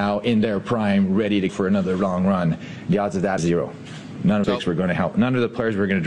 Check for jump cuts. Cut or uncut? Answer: cut